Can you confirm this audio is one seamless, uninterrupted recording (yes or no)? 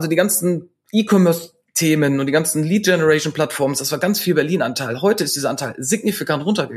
yes